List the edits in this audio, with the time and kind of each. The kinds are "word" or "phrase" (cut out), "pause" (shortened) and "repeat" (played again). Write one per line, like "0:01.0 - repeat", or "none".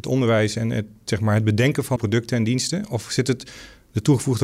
0:02.0 - word

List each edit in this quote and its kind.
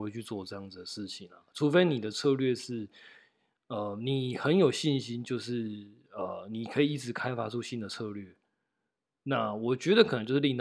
none

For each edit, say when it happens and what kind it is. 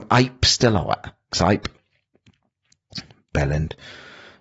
0:01.3 - word

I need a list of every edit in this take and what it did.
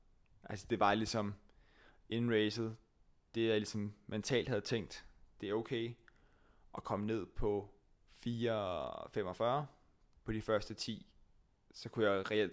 none

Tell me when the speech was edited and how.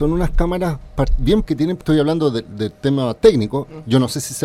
0:01.4 - word
0:01.8 - word

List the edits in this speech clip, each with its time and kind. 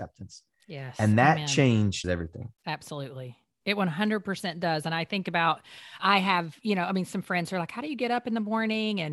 0:02.0 - word
0:02.6 - pause
0:06.0 - word

